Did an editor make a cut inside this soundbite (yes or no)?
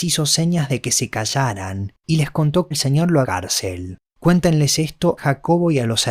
yes